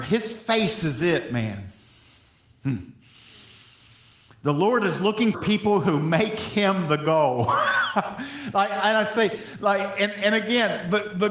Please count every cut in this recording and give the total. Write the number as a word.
one